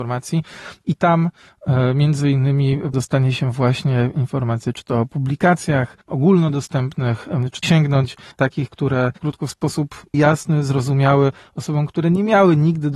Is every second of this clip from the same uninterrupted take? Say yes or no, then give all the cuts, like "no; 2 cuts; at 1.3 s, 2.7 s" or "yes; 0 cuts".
no; 6 cuts; at 2.9 s, 6.0 s, 7.6 s, 8.3 s, 9.2 s, 10.1 s